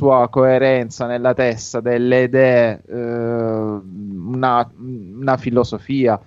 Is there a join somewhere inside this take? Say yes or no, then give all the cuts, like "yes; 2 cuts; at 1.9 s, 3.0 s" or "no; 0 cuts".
no; 0 cuts